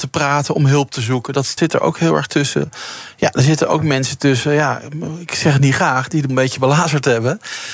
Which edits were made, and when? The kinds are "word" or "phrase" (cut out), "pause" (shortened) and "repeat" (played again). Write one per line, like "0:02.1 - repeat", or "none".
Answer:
0:01.6 - word
0:06.3 - word